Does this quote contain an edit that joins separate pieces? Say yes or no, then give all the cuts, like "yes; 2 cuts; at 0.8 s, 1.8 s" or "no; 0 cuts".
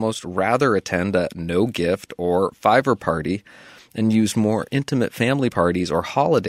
no; 0 cuts